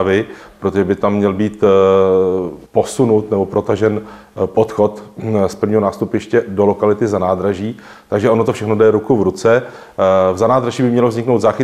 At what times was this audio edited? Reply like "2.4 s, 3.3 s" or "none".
2.7 s